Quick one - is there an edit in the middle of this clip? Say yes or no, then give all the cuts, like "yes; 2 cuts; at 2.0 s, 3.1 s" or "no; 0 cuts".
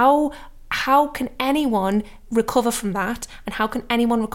no; 0 cuts